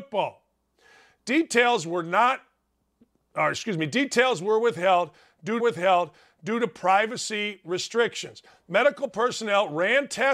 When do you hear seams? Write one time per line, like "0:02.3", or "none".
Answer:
0:05.6